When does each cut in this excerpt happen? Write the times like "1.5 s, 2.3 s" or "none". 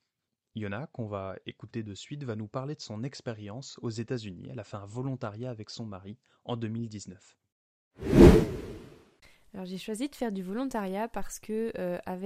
none